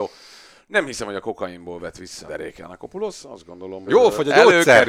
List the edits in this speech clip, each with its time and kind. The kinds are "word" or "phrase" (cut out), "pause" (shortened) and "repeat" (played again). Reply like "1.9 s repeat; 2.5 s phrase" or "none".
2.3 s word; 3.9 s word